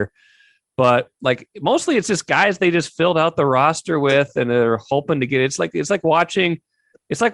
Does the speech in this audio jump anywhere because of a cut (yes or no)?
no